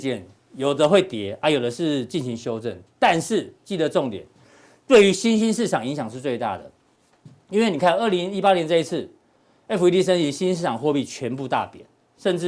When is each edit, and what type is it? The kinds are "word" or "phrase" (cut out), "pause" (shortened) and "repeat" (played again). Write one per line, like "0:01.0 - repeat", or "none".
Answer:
none